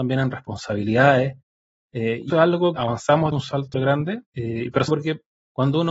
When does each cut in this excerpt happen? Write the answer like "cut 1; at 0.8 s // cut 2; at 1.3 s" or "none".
cut 1; at 2.3 s // cut 2; at 2.8 s // cut 3; at 3.3 s // cut 4; at 3.7 s // cut 5; at 4.2 s // cut 6; at 4.9 s